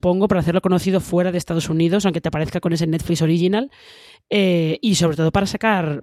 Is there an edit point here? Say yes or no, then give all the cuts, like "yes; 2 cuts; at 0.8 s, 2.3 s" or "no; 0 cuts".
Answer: no; 0 cuts